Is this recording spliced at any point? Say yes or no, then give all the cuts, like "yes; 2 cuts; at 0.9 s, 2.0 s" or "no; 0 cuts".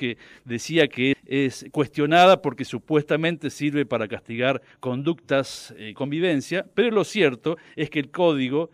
yes; 2 cuts; at 1.1 s, 6.0 s